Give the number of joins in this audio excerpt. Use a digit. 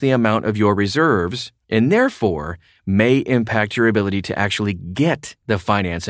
1